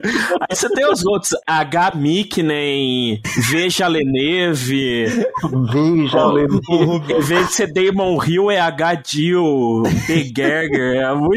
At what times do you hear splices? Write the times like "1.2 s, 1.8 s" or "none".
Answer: none